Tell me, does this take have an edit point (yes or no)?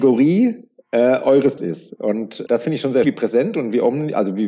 yes